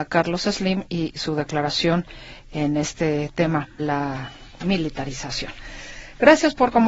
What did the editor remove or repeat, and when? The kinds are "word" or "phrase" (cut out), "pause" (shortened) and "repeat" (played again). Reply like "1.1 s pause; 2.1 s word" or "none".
3.8 s word